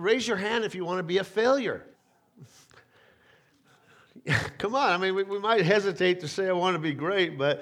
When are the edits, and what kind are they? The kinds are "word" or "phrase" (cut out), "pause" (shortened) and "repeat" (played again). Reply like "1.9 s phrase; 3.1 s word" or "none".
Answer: 1.9 s pause